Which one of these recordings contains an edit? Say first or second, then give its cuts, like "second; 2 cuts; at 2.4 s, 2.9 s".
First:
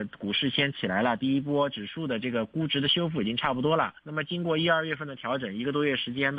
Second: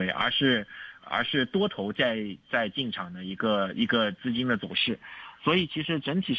first; 1 cut; at 4.0 s